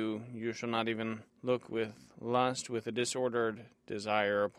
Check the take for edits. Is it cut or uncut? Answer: uncut